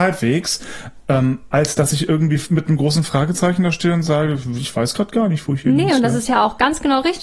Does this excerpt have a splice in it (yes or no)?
no